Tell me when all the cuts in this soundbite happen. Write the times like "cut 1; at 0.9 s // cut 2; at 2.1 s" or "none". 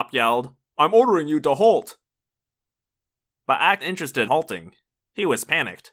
cut 1; at 3.8 s // cut 2; at 4.3 s